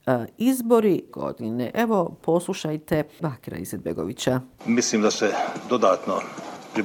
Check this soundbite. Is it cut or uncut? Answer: cut